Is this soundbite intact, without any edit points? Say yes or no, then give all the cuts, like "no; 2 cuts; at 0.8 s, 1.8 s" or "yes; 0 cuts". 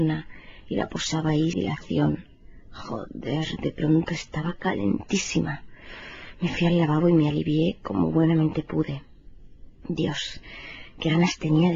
no; 1 cut; at 1.5 s